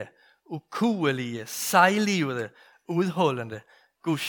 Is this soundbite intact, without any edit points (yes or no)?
yes